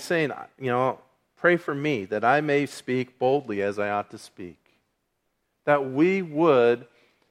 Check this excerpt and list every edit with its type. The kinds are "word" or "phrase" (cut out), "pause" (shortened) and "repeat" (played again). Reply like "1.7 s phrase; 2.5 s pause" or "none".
none

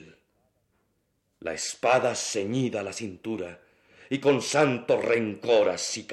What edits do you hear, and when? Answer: none

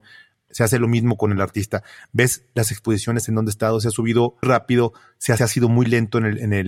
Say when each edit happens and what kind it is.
4.4 s word; 5.4 s word

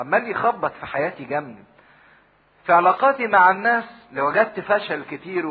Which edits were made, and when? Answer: none

